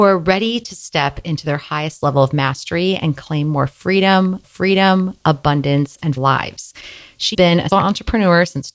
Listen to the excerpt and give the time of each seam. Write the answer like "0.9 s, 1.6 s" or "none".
4.4 s, 6.2 s, 7.3 s, 7.7 s